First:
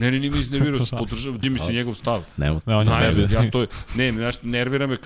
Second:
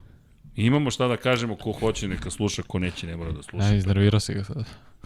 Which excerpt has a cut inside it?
first; 1 cut; at 1.4 s

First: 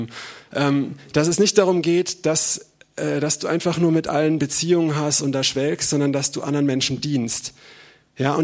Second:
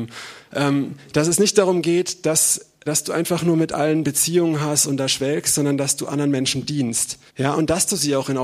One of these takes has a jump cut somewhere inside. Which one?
second; 2 cuts; at 2.9 s, 7.3 s

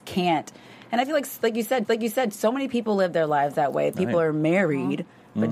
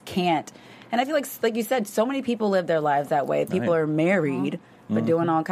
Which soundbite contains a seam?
first; 1 cut; at 1.8 s

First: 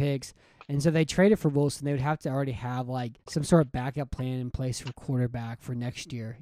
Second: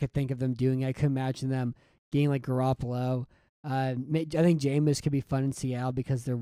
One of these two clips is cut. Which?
first; 1 cut; at 3.2 s

